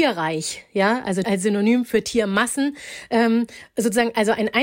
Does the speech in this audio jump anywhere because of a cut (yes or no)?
yes